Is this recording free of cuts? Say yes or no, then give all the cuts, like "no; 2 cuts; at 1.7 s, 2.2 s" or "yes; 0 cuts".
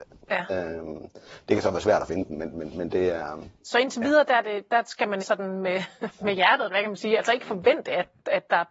no; 1 cut; at 5.2 s